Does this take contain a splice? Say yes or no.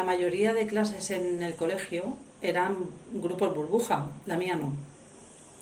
no